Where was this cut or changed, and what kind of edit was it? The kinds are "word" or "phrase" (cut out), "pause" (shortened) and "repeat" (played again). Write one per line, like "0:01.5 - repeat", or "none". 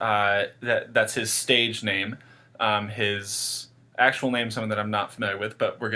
none